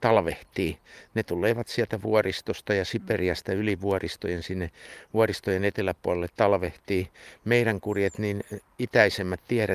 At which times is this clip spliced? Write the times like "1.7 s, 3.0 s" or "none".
none